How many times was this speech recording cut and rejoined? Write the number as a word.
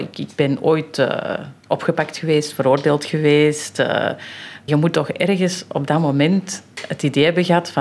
two